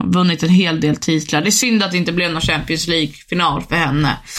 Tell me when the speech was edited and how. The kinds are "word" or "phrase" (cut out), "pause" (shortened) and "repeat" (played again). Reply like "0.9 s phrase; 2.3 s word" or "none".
none